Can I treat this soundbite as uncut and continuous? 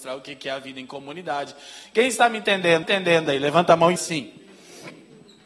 no; 2 cuts; at 2.8 s, 4.0 s

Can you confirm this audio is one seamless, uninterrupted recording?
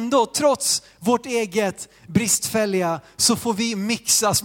yes; 0 cuts

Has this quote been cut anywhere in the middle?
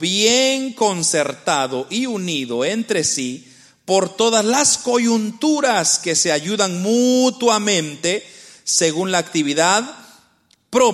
no; 0 cuts

